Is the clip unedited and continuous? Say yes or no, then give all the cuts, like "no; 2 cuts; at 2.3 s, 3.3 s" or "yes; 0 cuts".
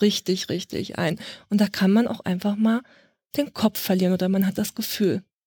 yes; 0 cuts